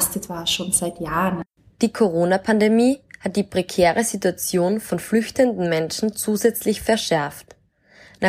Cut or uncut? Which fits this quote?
uncut